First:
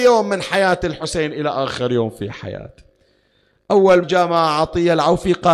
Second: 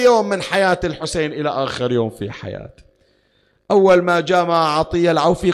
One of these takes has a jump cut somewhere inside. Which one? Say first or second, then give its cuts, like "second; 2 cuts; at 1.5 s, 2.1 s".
first; 1 cut; at 4.0 s